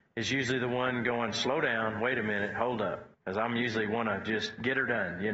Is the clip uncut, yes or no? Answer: no